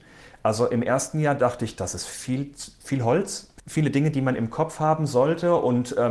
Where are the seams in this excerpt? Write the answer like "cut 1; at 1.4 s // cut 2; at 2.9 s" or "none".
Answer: none